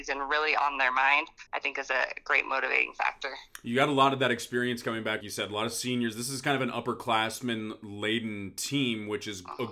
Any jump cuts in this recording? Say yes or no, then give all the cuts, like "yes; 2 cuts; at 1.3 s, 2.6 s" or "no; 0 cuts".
yes; 2 cuts; at 1.5 s, 5.2 s